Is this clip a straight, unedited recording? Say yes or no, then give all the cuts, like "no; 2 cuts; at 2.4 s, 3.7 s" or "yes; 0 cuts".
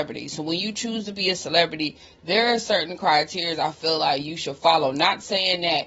yes; 0 cuts